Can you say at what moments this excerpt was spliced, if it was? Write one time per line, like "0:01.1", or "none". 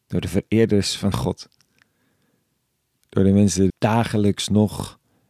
0:01.1
0:03.7